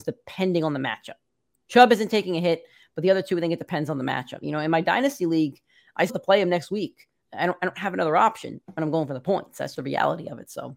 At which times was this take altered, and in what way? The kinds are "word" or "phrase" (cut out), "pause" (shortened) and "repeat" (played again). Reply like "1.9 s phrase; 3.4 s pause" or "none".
6.1 s word; 8.6 s pause; 9.7 s word